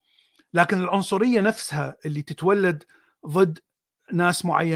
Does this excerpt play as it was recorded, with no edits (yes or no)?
yes